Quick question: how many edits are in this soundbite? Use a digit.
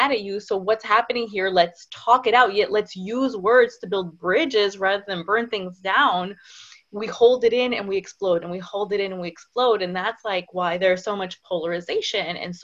0